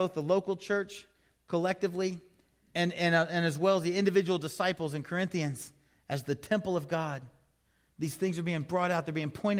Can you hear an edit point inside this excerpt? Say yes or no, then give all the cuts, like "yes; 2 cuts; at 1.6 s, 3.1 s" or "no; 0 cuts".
no; 0 cuts